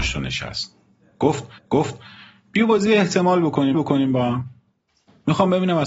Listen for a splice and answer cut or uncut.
cut